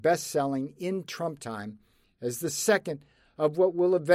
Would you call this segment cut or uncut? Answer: uncut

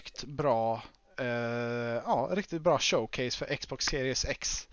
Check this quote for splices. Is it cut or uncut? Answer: cut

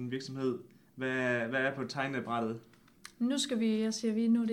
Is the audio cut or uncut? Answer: uncut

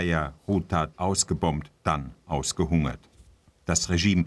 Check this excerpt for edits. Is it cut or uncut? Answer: cut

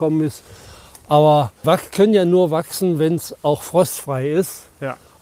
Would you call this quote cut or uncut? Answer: cut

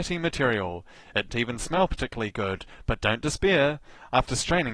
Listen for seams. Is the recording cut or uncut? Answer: cut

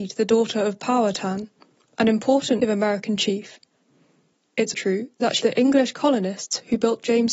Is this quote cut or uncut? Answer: cut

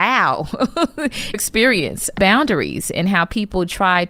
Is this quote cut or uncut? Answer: cut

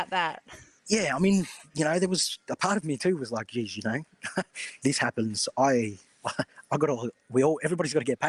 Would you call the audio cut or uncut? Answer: cut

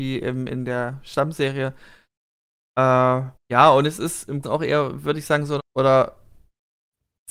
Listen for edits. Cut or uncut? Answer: cut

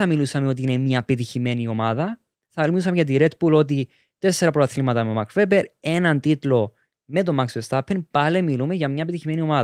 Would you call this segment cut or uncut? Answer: uncut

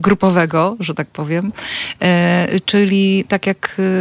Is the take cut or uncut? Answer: uncut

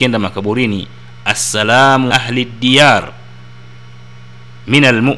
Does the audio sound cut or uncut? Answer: cut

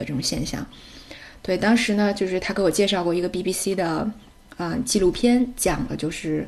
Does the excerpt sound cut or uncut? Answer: uncut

